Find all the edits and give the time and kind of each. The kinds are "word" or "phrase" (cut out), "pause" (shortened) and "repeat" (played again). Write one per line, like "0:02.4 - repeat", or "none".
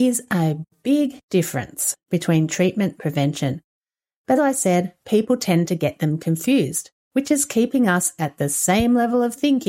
0:02.0 - pause
0:03.0 - word
0:04.4 - word
0:05.0 - pause
0:07.0 - pause